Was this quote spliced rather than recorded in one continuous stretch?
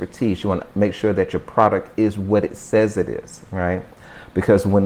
no; 0 cuts

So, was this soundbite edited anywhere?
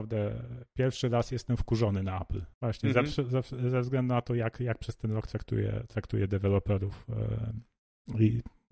yes; 1 cut; at 2.5 s

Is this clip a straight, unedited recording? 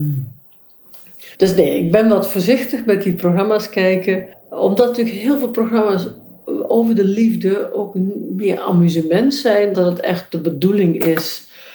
no; 3 cuts; at 1.3 s, 4.3 s, 9.7 s

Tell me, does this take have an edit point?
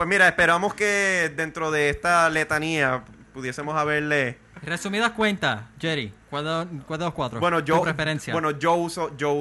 yes; 1 cut; at 6.2 s

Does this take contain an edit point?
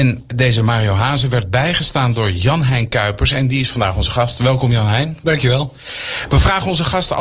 no; 0 cuts

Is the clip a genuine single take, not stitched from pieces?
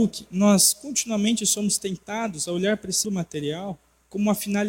no; 1 cut; at 3.0 s

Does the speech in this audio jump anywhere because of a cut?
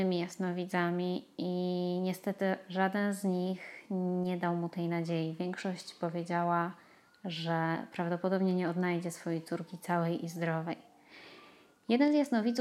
no; 0 cuts

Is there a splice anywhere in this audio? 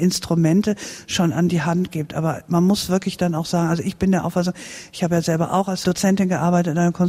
no; 0 cuts

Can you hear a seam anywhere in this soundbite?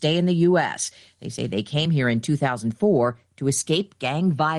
no; 0 cuts

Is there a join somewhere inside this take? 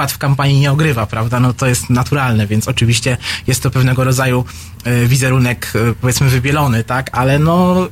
no; 0 cuts

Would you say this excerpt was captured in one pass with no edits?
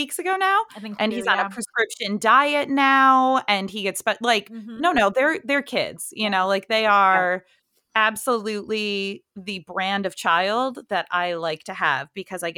no; 1 cut; at 9.3 s

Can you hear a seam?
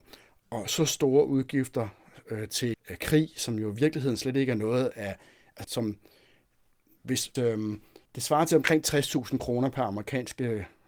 yes; 4 cuts; at 2.7 s, 5.6 s, 7.4 s, 8.1 s

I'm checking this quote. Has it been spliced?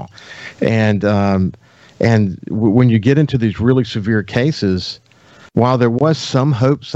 no; 0 cuts

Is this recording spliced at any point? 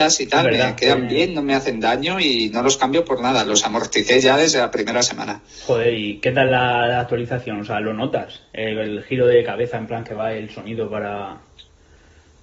no; 0 cuts

